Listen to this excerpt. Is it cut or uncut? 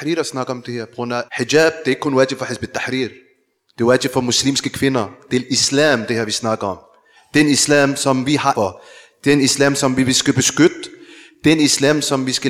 cut